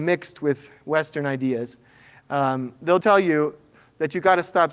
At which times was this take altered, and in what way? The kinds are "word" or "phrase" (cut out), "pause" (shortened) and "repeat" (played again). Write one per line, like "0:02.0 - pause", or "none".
0:03.0 - word